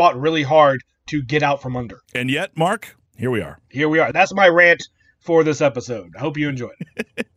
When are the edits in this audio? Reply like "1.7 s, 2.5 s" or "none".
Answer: 2.0 s, 3.1 s

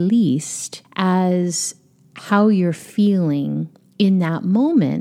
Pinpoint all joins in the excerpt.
none

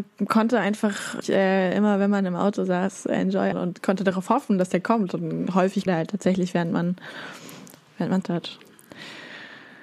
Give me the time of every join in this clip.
1.2 s, 3.5 s, 5.9 s, 8.2 s

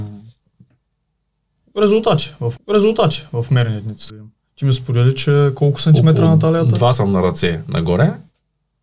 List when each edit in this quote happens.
2.6 s, 4.1 s, 6.9 s

